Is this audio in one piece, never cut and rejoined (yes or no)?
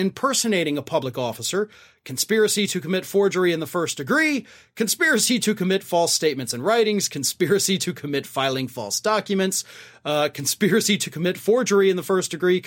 yes